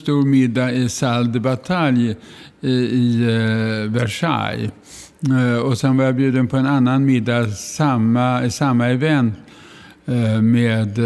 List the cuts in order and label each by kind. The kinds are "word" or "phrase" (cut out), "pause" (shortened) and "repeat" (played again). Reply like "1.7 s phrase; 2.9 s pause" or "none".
none